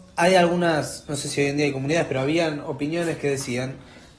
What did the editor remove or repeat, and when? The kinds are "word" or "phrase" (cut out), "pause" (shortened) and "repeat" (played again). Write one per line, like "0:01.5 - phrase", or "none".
none